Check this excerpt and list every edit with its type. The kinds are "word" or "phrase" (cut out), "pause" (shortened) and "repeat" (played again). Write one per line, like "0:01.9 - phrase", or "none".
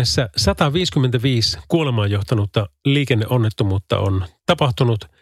none